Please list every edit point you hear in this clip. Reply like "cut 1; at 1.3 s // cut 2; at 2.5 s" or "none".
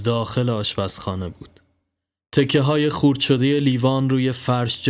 none